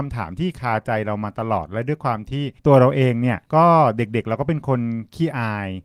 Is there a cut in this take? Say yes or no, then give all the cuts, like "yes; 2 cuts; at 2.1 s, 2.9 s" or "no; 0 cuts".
yes; 2 cuts; at 2.6 s, 3.5 s